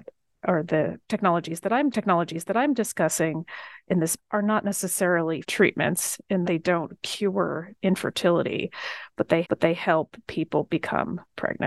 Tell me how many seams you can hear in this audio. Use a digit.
5